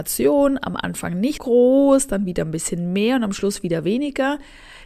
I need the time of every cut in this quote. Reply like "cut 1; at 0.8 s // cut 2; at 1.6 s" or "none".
cut 1; at 1.4 s